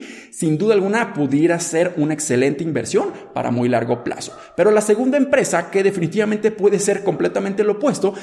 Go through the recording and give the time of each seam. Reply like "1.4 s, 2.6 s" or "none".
none